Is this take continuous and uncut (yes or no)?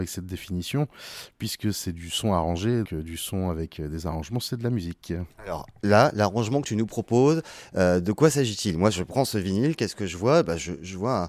no